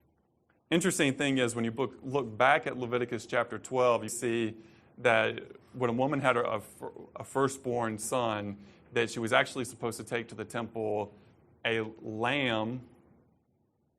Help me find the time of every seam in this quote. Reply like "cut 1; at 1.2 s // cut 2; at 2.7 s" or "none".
cut 1; at 4.1 s